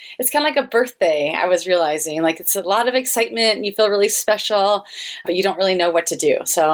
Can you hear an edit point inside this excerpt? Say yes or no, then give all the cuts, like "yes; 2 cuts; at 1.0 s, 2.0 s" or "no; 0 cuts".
no; 0 cuts